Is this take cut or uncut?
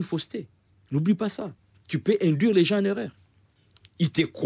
uncut